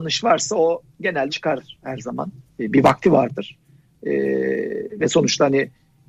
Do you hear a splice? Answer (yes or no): yes